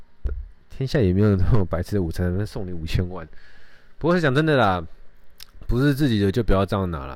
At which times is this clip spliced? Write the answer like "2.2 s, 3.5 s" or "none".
none